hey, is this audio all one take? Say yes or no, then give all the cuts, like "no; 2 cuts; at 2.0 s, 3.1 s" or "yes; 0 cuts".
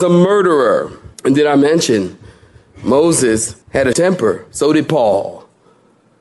no; 4 cuts; at 1.1 s, 3.6 s, 3.9 s, 4.9 s